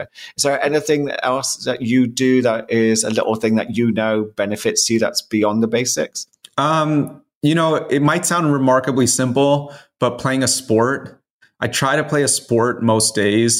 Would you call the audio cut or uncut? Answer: uncut